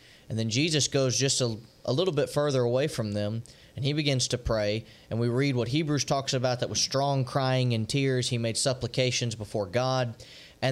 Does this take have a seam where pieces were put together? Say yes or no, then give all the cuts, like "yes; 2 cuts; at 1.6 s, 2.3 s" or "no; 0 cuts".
no; 0 cuts